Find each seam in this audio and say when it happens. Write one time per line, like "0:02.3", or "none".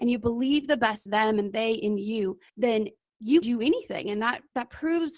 0:01.1
0:02.5
0:03.4